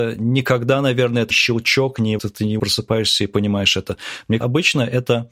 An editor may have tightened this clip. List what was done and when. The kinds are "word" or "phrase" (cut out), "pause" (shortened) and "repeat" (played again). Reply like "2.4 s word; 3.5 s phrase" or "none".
1.3 s word; 2.2 s word; 2.6 s word; 4.4 s word